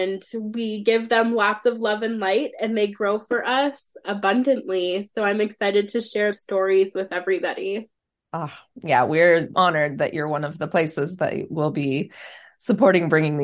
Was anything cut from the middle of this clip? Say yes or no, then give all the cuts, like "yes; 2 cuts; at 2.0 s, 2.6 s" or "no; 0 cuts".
yes; 2 cuts; at 6.3 s, 9.5 s